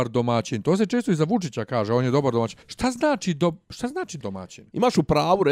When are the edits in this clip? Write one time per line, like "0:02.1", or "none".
0:02.6
0:04.2